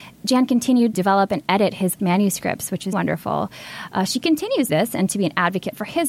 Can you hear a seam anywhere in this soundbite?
yes; 4 cuts; at 0.9 s, 2.0 s, 2.9 s, 4.7 s

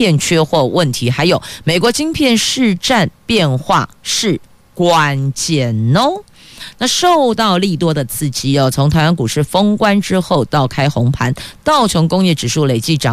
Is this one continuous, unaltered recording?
no; 1 cut; at 3.9 s

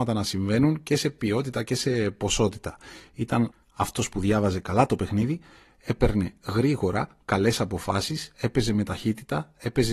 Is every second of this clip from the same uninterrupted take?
yes; 0 cuts

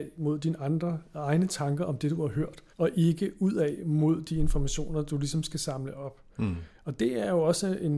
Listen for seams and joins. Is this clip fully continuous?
no; 1 cut; at 2.7 s

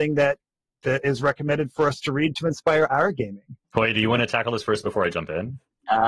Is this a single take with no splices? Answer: no; 1 cut; at 3.6 s

